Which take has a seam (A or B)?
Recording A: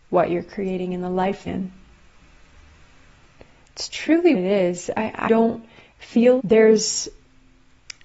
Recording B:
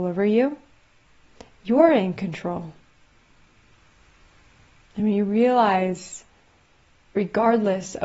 A